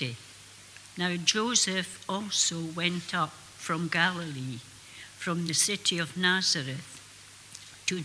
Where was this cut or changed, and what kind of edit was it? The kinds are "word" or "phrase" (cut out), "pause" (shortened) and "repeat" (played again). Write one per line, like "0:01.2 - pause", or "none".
none